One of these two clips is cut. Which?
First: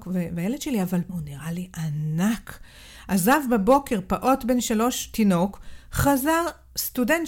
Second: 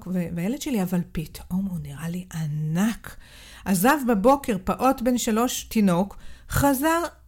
first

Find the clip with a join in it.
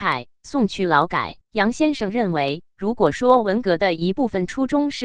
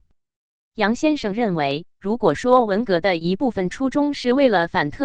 first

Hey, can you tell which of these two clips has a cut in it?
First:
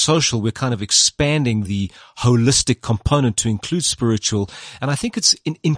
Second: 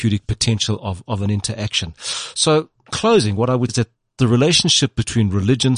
second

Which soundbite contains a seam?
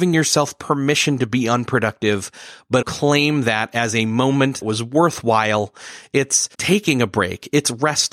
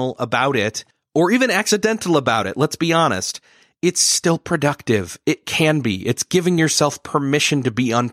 first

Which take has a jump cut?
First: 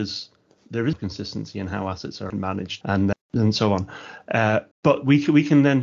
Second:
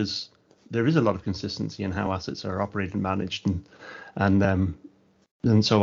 first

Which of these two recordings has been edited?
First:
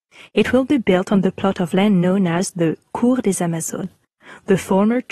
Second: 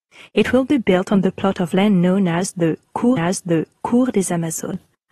second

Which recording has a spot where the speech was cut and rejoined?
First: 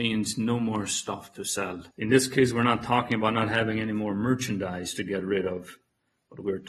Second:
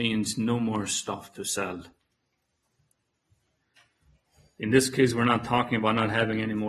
first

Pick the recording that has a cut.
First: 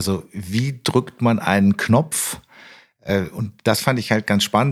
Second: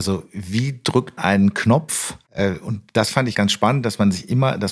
second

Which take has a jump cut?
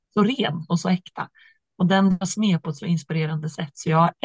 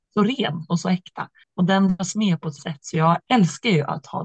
second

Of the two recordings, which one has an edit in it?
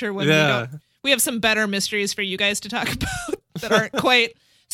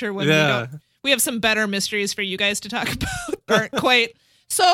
second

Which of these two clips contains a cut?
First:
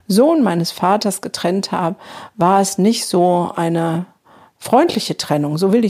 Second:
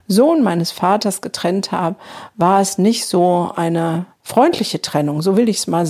second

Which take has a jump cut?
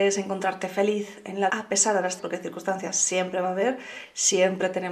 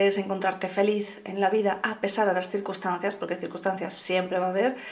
first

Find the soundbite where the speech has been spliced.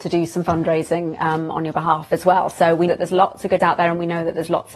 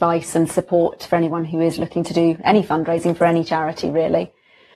first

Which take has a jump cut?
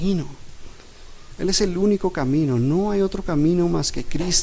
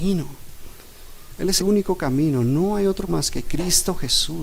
second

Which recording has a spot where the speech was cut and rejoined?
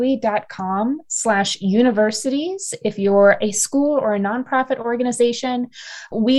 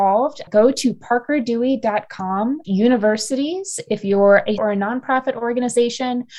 second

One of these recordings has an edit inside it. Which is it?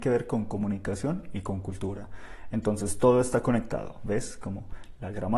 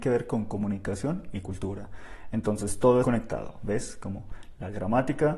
second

